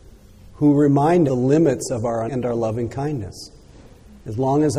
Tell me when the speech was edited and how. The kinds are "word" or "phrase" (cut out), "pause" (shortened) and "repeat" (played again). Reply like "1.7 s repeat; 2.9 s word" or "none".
1.3 s word; 2.3 s word